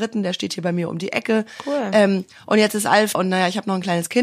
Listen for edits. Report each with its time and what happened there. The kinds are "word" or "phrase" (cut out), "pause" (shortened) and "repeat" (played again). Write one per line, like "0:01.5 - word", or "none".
0:03.1 - word